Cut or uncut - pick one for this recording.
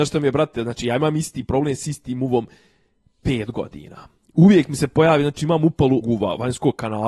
cut